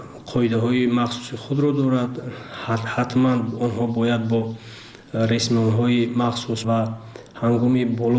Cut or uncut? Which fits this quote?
cut